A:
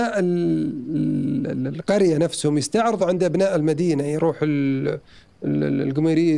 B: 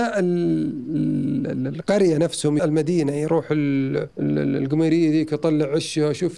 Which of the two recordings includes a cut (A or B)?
B